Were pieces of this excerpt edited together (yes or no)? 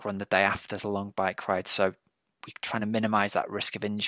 no